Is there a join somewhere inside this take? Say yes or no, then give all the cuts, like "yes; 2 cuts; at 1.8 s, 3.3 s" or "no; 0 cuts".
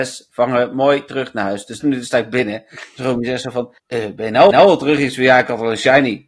yes; 3 cuts; at 1.8 s, 3.8 s, 4.5 s